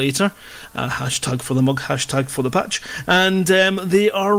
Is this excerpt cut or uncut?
uncut